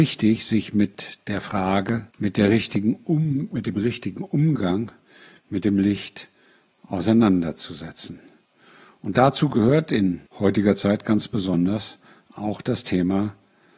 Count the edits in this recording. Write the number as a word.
two